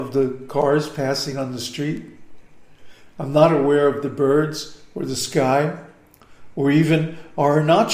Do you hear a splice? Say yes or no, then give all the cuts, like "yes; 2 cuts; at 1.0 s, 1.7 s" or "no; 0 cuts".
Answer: no; 0 cuts